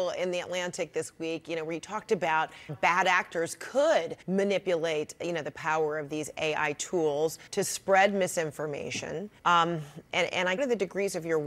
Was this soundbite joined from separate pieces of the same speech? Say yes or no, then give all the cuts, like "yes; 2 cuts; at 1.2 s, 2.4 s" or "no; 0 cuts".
yes; 5 cuts; at 2.7 s, 4.2 s, 7.5 s, 9.4 s, 10.6 s